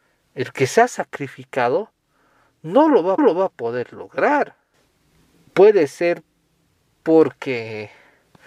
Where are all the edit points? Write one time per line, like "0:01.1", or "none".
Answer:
0:03.2
0:04.7